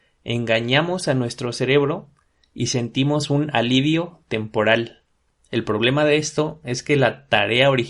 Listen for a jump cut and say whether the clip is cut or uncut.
uncut